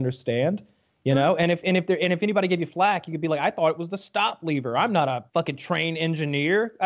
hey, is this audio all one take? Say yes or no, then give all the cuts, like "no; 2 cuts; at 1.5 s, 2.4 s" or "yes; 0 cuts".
no; 1 cut; at 5.3 s